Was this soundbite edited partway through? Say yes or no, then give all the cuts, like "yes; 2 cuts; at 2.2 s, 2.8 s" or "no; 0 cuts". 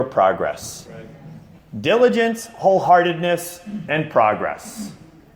no; 0 cuts